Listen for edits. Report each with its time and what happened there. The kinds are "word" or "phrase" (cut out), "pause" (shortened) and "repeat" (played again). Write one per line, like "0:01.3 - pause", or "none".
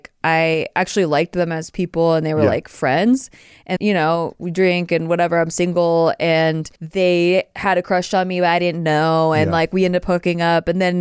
0:03.8 - word
0:06.8 - pause